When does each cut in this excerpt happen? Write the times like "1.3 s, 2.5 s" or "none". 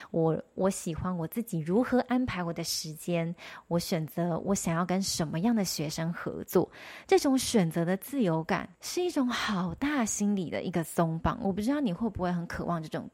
8.7 s